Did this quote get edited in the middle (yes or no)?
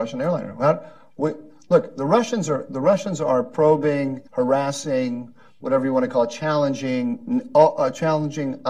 yes